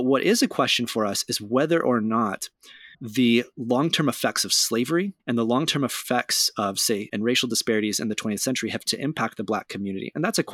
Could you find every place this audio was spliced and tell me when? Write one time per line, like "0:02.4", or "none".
0:02.9
0:05.2
0:07.1
0:08.9